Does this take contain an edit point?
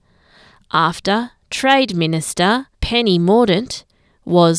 yes; 1 cut; at 2.7 s

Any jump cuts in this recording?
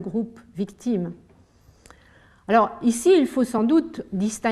no; 0 cuts

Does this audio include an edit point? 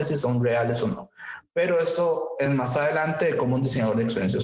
no; 0 cuts

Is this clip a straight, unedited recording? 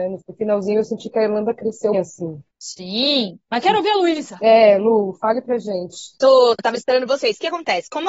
no; 2 cuts; at 1.9 s, 6.6 s

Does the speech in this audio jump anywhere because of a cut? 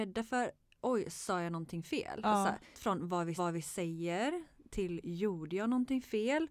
yes; 2 cuts; at 2.7 s, 3.4 s

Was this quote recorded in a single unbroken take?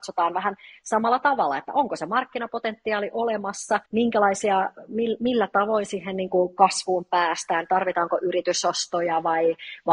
no; 1 cut; at 3.9 s

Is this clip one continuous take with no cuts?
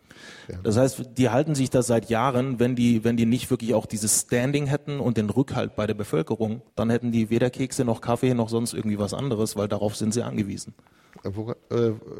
no; 1 cut; at 6.7 s

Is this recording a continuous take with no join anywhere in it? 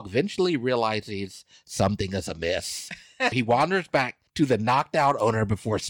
no; 2 cuts; at 3.3 s, 4.3 s

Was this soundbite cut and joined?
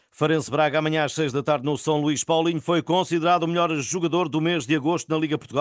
no; 0 cuts

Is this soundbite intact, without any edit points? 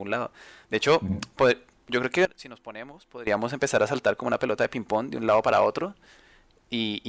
yes; 0 cuts

